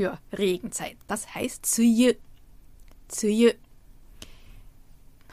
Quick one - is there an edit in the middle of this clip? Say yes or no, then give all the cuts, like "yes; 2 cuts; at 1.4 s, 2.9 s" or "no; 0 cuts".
yes; 1 cut; at 1.6 s